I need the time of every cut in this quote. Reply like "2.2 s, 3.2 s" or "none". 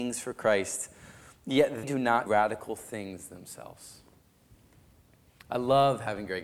1.8 s, 2.3 s